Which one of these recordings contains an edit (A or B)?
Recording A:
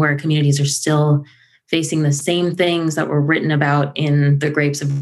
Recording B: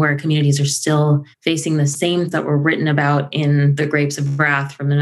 B